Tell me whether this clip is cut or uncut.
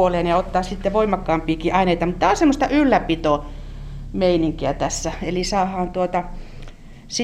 uncut